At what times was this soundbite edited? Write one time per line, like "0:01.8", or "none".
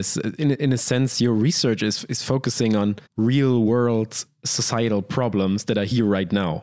0:03.1